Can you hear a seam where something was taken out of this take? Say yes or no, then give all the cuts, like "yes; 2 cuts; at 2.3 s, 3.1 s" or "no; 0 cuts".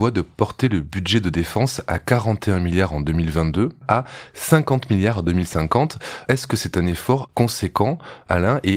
no; 0 cuts